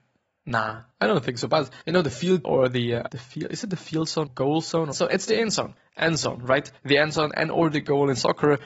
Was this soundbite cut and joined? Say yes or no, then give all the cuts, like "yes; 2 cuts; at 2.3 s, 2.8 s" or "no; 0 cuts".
yes; 7 cuts; at 0.9 s, 1.8 s, 2.4 s, 3.1 s, 4.3 s, 4.9 s, 6.8 s